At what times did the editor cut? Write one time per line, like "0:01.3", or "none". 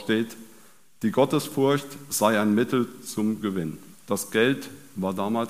0:03.9